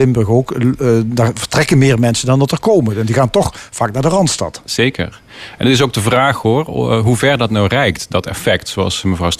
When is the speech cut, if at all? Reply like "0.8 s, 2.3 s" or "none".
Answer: none